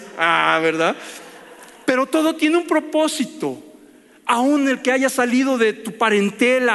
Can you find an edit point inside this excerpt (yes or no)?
no